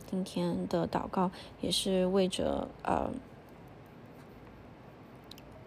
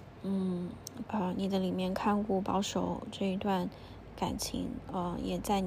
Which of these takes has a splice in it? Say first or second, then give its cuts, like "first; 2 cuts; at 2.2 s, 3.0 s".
second; 1 cut; at 1.0 s